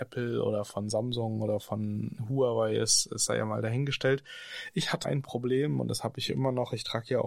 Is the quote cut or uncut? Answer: cut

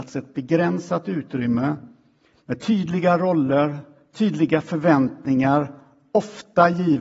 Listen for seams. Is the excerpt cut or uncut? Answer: uncut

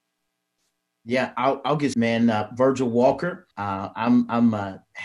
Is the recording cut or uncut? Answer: cut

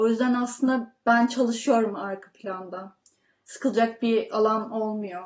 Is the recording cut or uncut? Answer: uncut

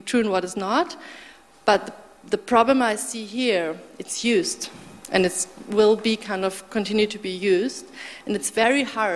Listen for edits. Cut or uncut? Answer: uncut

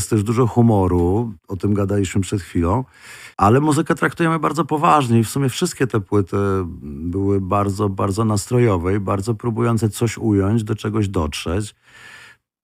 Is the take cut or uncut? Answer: cut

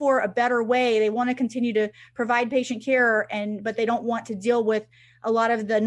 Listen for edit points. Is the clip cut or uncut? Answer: uncut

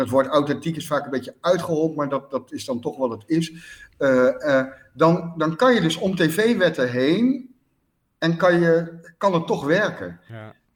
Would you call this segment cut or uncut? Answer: uncut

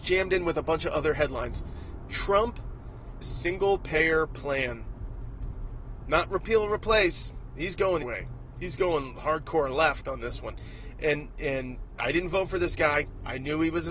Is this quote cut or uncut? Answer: cut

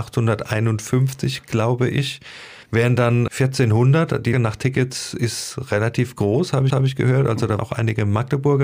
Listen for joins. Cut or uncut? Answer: cut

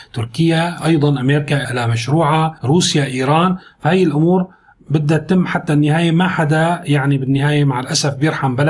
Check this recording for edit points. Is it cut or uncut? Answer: cut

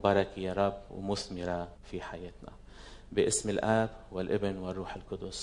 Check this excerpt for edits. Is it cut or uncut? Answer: cut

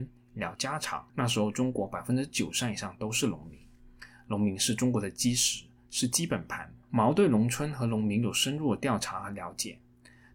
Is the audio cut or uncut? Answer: cut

